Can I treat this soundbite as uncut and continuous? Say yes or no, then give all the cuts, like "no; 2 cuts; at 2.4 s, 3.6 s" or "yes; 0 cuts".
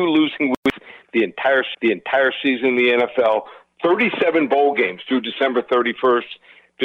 no; 1 cut; at 1.7 s